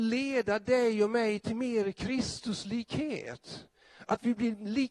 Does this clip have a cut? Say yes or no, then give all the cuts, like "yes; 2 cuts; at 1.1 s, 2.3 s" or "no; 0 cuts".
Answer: no; 0 cuts